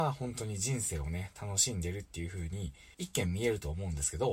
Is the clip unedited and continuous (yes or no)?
no